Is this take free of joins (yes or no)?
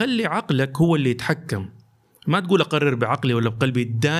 yes